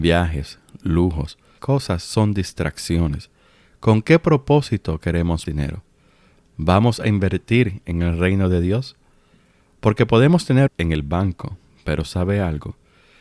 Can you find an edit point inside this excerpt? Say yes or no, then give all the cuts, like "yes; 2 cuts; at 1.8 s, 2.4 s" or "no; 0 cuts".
yes; 3 cuts; at 1.6 s, 5.5 s, 10.7 s